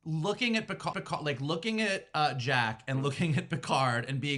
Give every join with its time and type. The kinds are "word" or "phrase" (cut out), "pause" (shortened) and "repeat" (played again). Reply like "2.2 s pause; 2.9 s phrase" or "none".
0.9 s repeat